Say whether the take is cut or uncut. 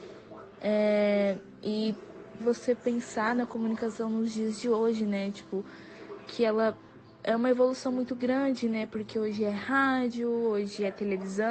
cut